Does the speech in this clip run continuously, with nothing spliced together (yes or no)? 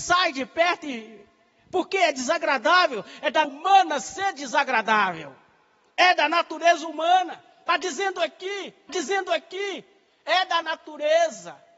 no